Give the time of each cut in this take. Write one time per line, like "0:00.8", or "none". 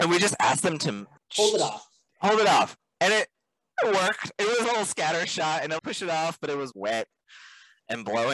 0:01.2
0:04.6
0:05.8
0:06.7